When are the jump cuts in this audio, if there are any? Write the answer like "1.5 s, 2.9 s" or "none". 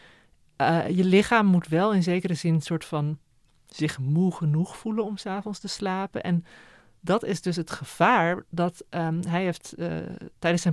none